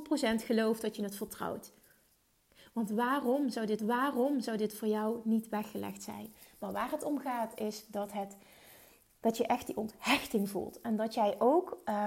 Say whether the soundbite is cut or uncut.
cut